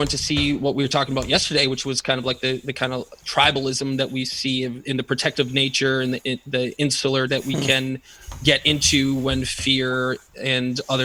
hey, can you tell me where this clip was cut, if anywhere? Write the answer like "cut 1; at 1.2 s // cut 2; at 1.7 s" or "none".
cut 1; at 6.2 s // cut 2; at 7.3 s

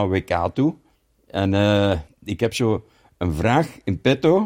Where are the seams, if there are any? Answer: cut 1; at 0.9 s // cut 2; at 2.1 s

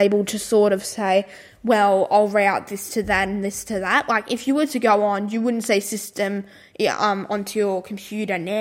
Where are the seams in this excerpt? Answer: none

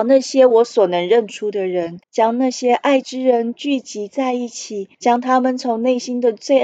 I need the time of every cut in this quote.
cut 1; at 2.0 s // cut 2; at 4.9 s

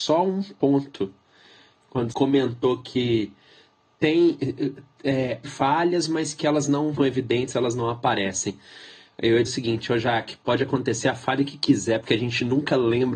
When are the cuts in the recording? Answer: cut 1; at 2.1 s // cut 2; at 5.4 s // cut 3; at 7.0 s // cut 4; at 9.5 s

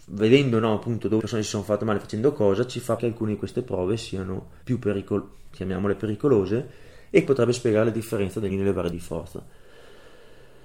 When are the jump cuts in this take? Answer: cut 1; at 1.2 s // cut 2; at 3.0 s // cut 3; at 4.6 s // cut 4; at 7.3 s // cut 5; at 8.5 s // cut 6; at 8.9 s

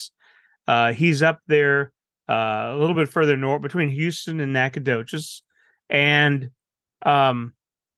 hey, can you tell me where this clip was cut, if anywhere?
none

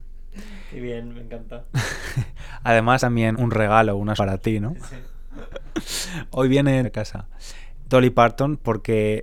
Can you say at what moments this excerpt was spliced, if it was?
cut 1; at 3.0 s // cut 2; at 3.3 s // cut 3; at 4.2 s // cut 4; at 6.8 s

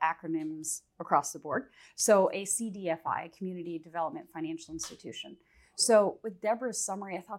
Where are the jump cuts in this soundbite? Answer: none

